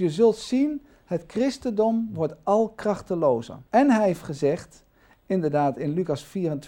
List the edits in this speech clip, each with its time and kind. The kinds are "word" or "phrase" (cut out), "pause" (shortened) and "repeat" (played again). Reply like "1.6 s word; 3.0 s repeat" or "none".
3.7 s pause